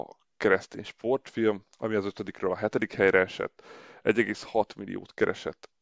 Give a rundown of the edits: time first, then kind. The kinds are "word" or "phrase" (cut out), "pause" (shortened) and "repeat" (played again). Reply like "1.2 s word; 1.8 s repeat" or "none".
1.7 s pause